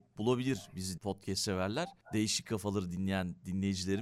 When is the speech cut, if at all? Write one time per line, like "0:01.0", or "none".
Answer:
0:01.0